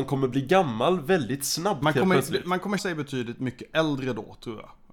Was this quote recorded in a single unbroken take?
no; 1 cut; at 2.8 s

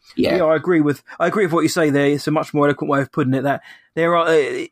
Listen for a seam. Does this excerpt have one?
no; 0 cuts

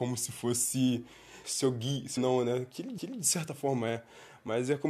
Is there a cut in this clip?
yes; 3 cuts; at 1.4 s, 2.2 s, 3.0 s

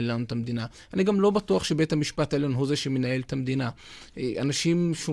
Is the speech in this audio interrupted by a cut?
no; 0 cuts

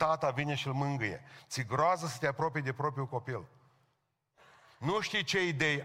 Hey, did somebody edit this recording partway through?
no; 0 cuts

